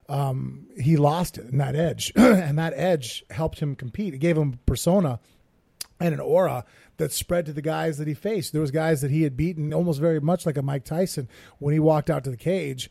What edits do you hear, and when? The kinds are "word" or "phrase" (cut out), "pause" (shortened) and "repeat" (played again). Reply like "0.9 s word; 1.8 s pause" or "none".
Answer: none